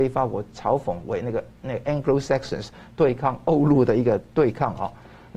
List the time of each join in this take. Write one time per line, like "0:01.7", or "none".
none